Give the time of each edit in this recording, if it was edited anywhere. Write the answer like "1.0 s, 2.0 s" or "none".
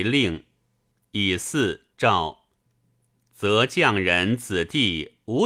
1.9 s